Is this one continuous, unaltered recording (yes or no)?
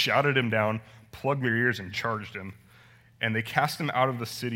yes